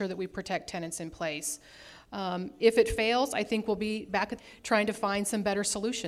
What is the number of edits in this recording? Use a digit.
1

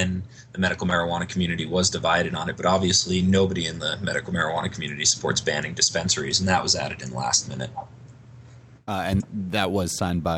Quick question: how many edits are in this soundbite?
1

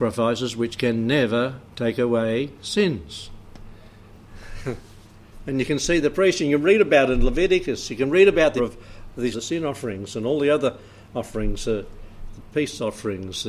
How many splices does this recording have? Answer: 2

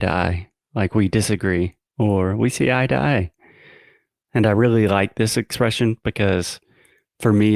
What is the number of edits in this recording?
0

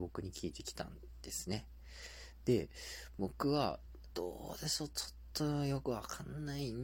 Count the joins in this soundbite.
1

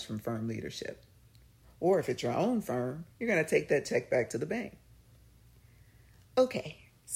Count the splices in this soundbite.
1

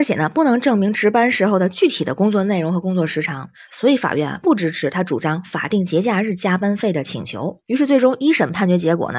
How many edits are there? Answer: 0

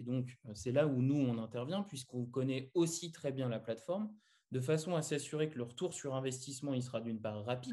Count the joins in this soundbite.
0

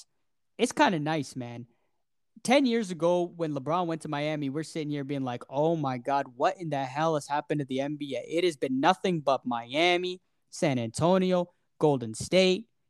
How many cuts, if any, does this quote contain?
0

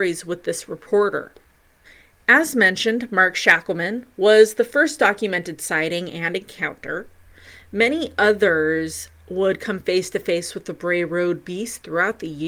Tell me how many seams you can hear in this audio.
1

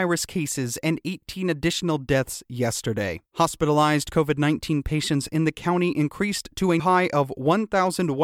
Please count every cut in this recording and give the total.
2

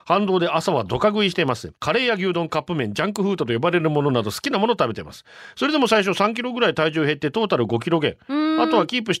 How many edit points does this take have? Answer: 1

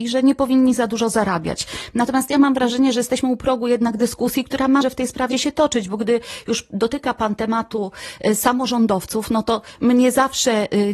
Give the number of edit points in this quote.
2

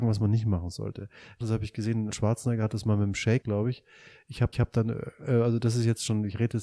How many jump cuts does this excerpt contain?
4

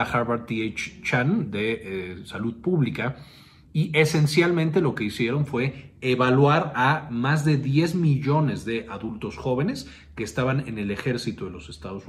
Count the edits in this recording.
0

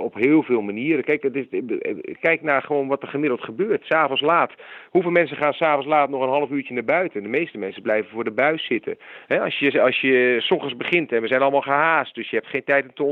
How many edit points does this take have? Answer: 1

